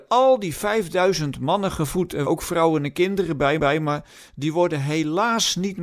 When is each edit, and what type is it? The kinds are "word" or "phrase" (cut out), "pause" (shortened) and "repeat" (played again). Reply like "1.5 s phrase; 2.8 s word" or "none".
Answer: 2.3 s word; 3.6 s repeat